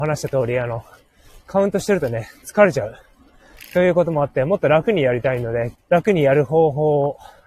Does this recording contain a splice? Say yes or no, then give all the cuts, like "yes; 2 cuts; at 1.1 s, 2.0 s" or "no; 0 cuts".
yes; 2 cuts; at 1.4 s, 5.7 s